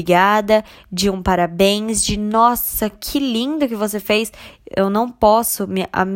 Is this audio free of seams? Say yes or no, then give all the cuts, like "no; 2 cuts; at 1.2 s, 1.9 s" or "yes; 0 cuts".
yes; 0 cuts